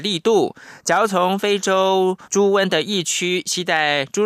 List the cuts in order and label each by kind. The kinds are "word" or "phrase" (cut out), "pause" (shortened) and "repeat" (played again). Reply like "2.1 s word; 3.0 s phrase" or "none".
2.2 s pause